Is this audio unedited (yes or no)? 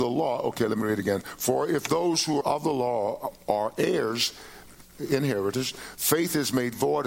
no